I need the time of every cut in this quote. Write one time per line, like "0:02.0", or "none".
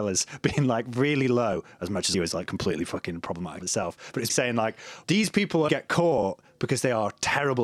0:02.1
0:03.6
0:04.3
0:05.0
0:05.7